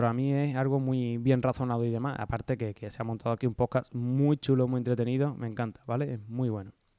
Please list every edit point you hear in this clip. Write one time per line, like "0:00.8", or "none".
none